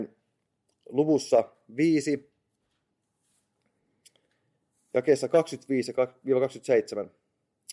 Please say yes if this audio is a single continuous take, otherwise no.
yes